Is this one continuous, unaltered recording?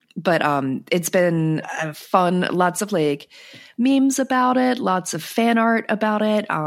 yes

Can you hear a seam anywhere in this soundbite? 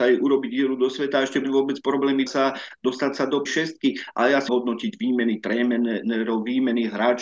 yes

